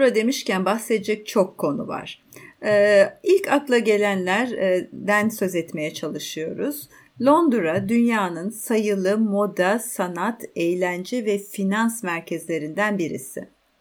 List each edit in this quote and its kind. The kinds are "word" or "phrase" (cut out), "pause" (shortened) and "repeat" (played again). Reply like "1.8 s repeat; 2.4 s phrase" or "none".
none